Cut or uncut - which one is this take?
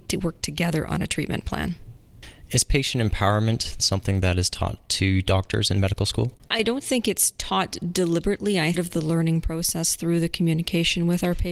cut